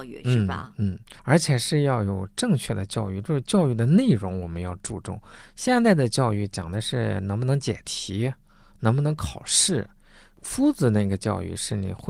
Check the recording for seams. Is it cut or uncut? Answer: cut